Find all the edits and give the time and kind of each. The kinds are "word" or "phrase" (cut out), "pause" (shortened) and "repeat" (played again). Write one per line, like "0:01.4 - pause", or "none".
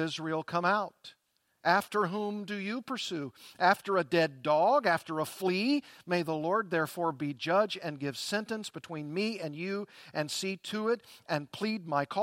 none